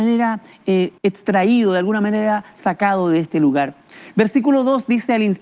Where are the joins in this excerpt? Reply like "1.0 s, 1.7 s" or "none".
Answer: 1.0 s